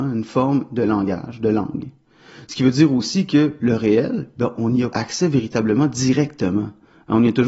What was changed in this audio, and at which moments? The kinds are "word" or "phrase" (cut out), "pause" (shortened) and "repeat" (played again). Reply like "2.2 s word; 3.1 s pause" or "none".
4.9 s word